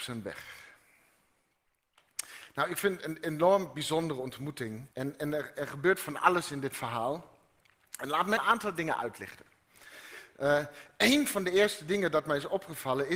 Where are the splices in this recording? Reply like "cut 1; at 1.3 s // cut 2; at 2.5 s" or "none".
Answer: cut 1; at 4.9 s // cut 2; at 8.4 s